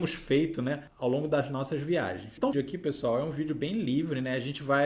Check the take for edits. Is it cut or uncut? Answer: cut